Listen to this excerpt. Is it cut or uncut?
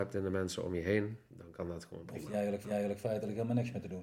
cut